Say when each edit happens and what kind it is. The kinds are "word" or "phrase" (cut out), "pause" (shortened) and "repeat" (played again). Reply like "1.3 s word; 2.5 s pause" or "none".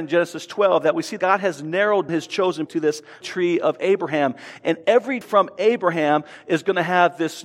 1.2 s word; 2.1 s word; 2.7 s word; 3.2 s word; 5.2 s word